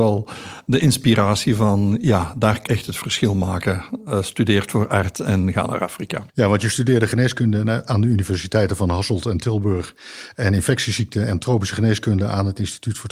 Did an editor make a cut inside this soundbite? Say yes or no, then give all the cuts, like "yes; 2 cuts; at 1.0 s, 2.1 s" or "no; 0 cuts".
yes; 2 cuts; at 2.7 s, 6.3 s